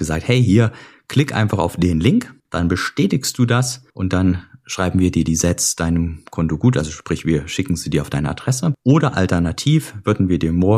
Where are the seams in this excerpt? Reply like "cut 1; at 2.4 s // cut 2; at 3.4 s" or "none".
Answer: cut 1; at 2.4 s // cut 2; at 6.3 s